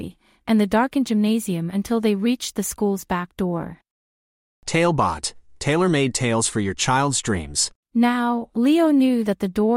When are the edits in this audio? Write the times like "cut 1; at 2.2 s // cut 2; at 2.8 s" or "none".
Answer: none